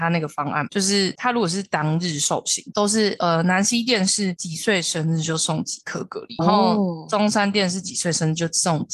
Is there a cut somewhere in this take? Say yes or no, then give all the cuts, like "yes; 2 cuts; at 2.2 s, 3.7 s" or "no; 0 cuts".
yes; 1 cut; at 6.4 s